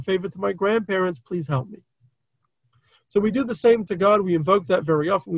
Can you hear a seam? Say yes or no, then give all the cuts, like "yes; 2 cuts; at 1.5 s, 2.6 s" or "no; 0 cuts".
no; 0 cuts